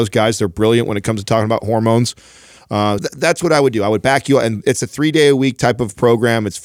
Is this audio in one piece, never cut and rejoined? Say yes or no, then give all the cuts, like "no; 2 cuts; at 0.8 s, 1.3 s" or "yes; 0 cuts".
no; 1 cut; at 3.0 s